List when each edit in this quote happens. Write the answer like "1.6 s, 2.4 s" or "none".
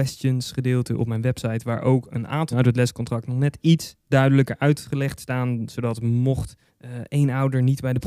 2.5 s, 6.7 s